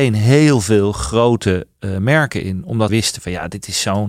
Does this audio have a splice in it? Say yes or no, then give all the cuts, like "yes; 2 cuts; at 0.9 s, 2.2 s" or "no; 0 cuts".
yes; 1 cut; at 2.9 s